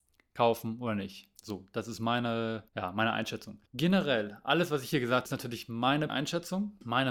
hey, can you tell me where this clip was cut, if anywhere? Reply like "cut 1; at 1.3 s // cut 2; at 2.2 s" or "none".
cut 1; at 2.7 s // cut 2; at 3.7 s // cut 3; at 5.3 s // cut 4; at 6.1 s

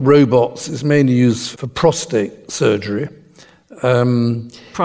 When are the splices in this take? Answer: cut 1; at 1.5 s

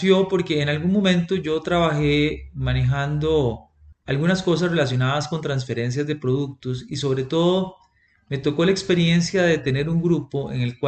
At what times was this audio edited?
cut 1; at 3.9 s

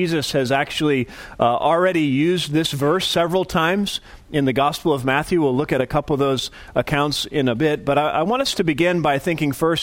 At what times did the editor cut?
none

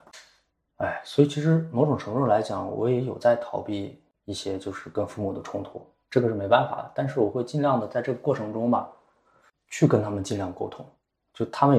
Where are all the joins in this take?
none

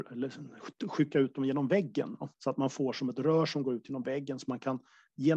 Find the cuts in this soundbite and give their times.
cut 1; at 2.3 s

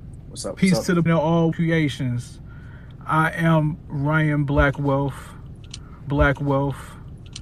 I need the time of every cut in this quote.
cut 1; at 1.1 s // cut 2; at 1.5 s // cut 3; at 6.1 s

